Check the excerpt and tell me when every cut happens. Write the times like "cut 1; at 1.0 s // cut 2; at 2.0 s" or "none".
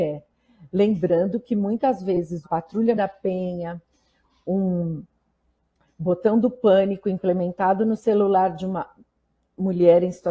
cut 1; at 2.4 s // cut 2; at 2.9 s